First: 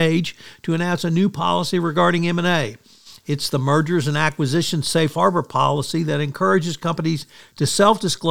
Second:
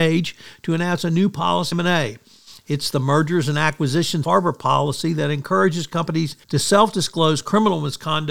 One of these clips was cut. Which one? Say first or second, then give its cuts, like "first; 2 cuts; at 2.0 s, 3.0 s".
second; 3 cuts; at 1.7 s, 4.2 s, 6.4 s